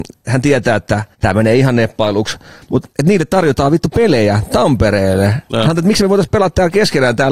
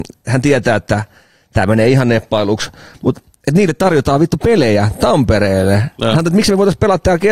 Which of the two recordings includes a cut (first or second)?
first